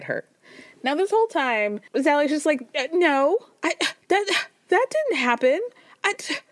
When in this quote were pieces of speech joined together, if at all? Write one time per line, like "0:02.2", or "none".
0:01.9
0:04.0